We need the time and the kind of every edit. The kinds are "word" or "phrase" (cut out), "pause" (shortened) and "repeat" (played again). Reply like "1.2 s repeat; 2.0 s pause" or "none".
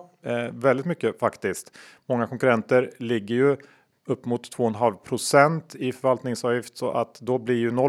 none